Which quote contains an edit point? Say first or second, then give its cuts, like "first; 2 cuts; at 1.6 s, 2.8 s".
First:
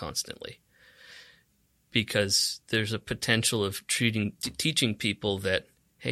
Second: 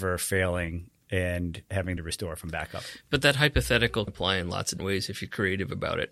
second; 3 cuts; at 2.0 s, 4.1 s, 4.8 s